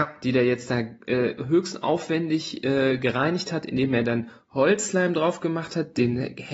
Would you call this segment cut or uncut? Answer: uncut